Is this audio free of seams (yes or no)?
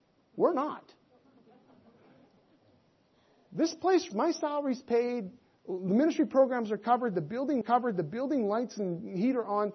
no